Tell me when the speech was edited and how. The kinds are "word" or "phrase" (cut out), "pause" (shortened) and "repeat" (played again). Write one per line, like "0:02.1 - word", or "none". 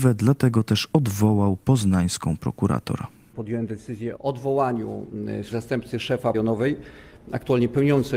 0:04.2 - word
0:05.5 - word
0:06.3 - word